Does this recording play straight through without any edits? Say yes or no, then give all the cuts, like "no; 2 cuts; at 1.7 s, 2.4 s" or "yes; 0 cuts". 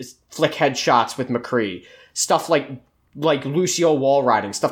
yes; 0 cuts